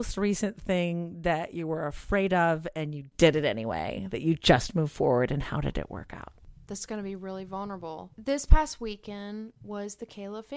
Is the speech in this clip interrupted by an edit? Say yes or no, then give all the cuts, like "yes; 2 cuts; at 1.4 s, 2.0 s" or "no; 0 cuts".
no; 0 cuts